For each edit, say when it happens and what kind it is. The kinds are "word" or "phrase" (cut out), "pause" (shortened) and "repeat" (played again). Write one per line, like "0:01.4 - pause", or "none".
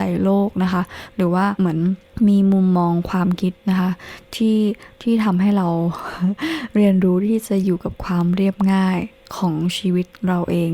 0:03.6 - pause